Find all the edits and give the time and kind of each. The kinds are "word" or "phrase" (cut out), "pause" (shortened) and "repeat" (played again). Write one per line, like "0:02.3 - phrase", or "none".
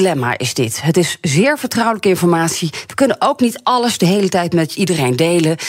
none